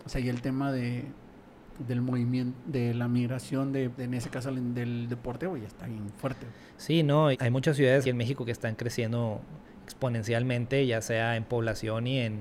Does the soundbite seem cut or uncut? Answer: cut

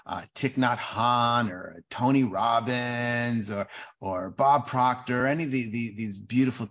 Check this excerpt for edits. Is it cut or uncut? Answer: uncut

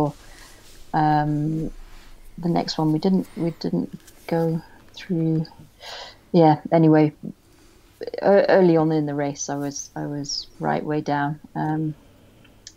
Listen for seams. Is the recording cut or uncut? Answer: cut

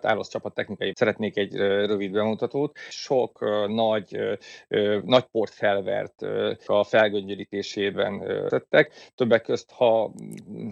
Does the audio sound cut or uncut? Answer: cut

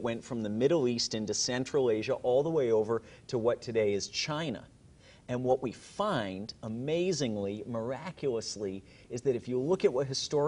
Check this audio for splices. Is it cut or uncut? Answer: uncut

